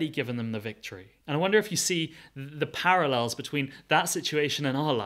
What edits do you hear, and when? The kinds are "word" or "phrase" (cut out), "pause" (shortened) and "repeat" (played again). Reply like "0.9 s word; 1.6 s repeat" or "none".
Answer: 1.2 s pause